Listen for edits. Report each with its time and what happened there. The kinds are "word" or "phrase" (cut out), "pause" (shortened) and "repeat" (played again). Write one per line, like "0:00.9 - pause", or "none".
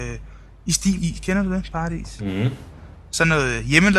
0:01.0 - phrase